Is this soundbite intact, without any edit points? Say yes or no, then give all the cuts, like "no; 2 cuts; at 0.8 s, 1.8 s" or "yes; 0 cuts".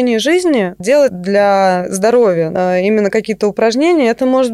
no; 1 cut; at 1.1 s